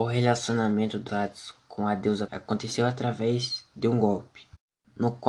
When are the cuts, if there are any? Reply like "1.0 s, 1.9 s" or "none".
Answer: 1.1 s, 2.3 s